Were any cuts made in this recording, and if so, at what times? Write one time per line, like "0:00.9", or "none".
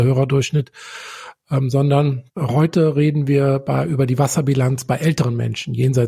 0:02.3